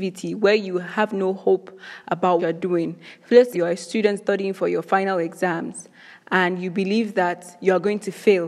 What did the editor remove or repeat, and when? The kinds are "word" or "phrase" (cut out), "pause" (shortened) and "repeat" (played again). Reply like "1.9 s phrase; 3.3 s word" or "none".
2.4 s word; 3.5 s phrase